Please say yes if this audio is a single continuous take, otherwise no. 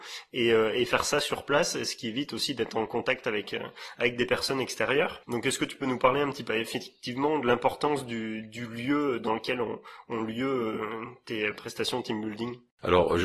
no